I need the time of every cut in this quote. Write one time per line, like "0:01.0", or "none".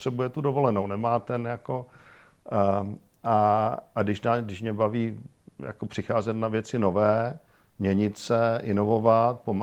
none